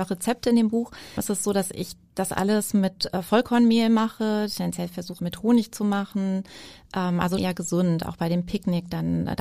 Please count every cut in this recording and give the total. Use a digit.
3